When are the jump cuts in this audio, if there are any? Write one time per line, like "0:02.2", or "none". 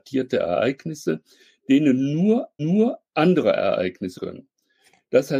0:02.6
0:04.2

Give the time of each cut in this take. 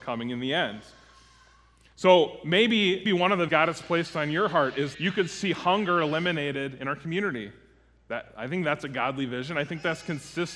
0:03.1
0:03.5
0:04.9

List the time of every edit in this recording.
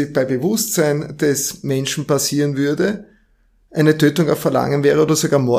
none

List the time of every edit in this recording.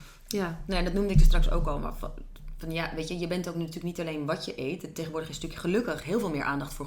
none

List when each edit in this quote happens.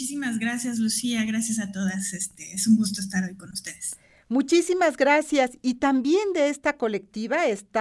none

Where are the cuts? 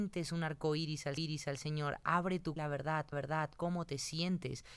0:01.2
0:02.6
0:03.1

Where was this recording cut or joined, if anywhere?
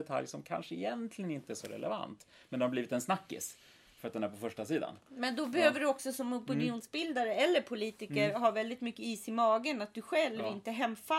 none

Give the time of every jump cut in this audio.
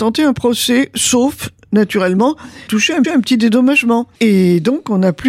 0:02.7
0:03.0
0:04.1

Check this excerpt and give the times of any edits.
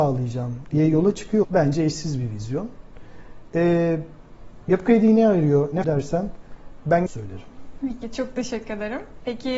0:01.4
0:05.8
0:07.1

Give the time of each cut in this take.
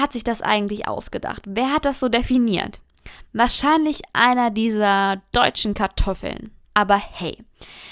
0:06.6

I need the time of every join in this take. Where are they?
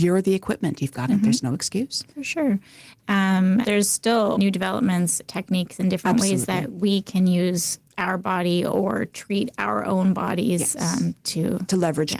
0:01.1
0:03.6
0:04.3
0:05.3

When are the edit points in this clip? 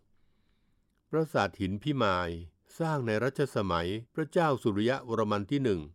0:02.6
0:04.1

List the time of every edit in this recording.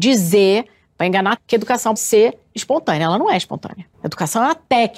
0:01.4
0:02.0
0:03.9

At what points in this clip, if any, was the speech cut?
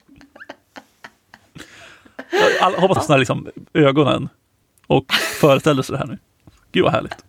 0:03.0
0:03.7
0:04.6

